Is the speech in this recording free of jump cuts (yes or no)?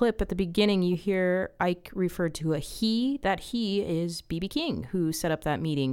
yes